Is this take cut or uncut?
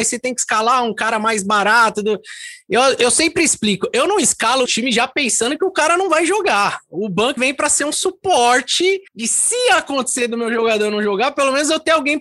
cut